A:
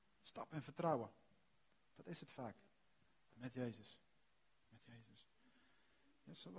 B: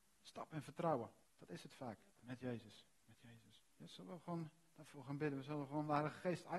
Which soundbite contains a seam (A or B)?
B